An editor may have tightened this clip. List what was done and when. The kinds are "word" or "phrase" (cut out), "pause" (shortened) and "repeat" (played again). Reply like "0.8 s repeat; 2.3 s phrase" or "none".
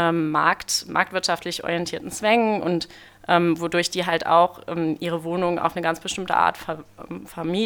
none

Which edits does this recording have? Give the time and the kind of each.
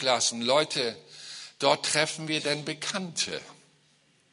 none

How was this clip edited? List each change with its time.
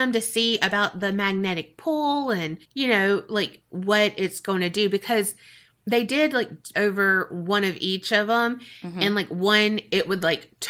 2.6 s pause; 6.7 s phrase

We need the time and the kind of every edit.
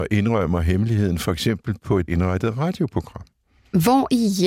2.1 s word

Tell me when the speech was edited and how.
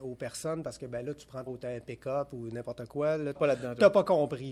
1.5 s phrase; 3.4 s word

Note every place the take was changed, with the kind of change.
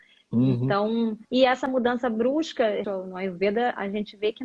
1.2 s pause; 2.8 s word

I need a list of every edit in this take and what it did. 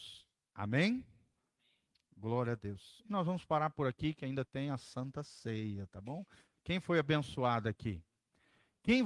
none

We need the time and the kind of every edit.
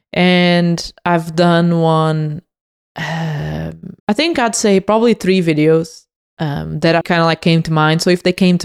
4.0 s pause; 7.0 s word

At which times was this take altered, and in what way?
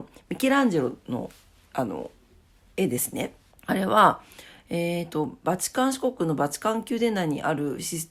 3.5 s pause

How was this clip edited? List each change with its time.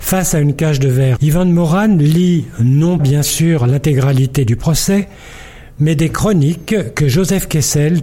1.2 s word; 3.0 s word

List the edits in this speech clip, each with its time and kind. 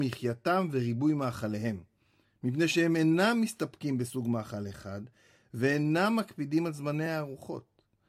none

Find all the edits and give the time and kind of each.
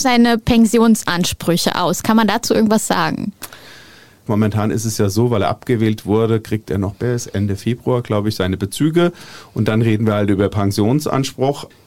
none

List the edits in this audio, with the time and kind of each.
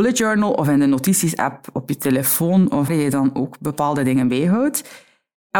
2.9 s word

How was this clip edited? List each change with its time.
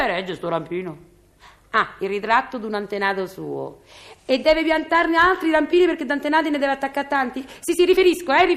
none

